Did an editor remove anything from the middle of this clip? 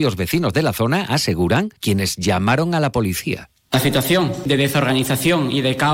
yes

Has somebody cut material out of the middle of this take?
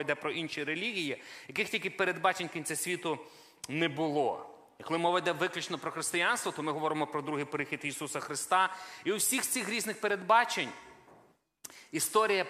no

